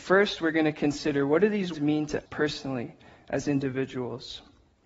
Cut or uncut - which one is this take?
cut